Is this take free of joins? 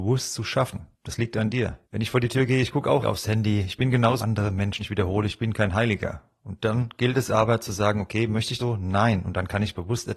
no; 6 cuts; at 0.9 s, 1.8 s, 3.0 s, 4.2 s, 4.8 s, 8.6 s

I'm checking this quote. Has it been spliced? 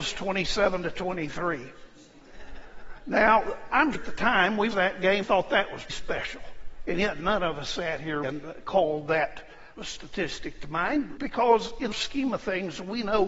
yes; 8 cuts; at 3.9 s, 4.7 s, 5.2 s, 5.9 s, 8.2 s, 9.8 s, 11.2 s, 11.9 s

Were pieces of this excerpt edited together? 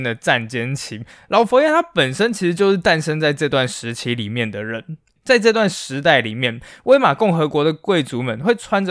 no; 0 cuts

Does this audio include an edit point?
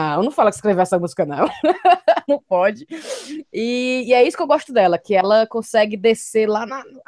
no; 0 cuts

